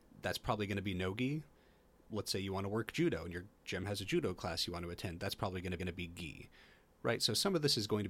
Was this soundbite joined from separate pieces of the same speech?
yes; 1 cut; at 5.8 s

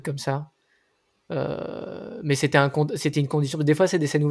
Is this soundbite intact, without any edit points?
yes; 0 cuts

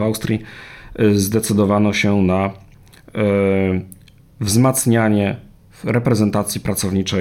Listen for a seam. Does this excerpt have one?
no; 0 cuts

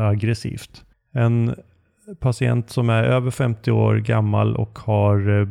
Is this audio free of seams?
no; 1 cut; at 0.9 s

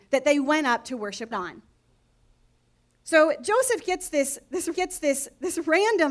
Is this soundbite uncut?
no; 2 cuts; at 1.3 s, 4.7 s

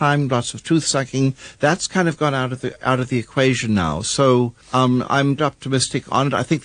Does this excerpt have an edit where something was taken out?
yes; 2 cuts; at 4.6 s, 5.4 s

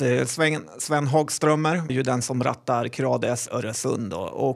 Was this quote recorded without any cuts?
no; 2 cuts; at 1.9 s, 3.5 s

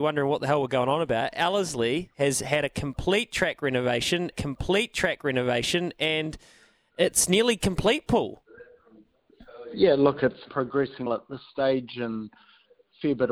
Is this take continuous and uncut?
no; 3 cuts; at 4.3 s, 10.4 s, 11.1 s

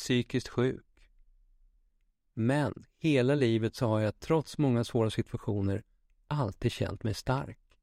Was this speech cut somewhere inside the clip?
no; 0 cuts

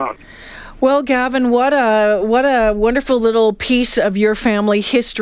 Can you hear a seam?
no; 0 cuts

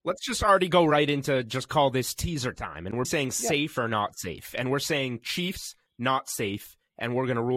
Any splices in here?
yes; 1 cut; at 3.0 s

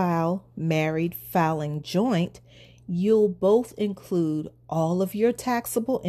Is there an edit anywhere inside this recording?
no; 0 cuts

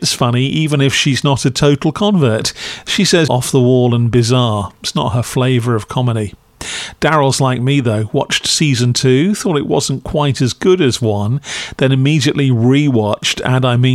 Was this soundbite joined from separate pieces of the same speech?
yes; 1 cut; at 3.3 s

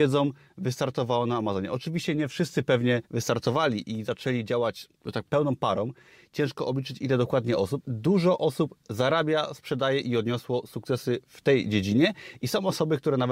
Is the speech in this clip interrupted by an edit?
yes; 4 cuts; at 3.0 s, 5.0 s, 5.3 s, 7.8 s

